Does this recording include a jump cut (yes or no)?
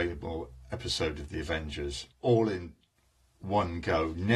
yes